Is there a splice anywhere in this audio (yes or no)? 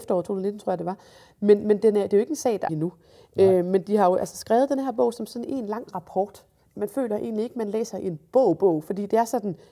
yes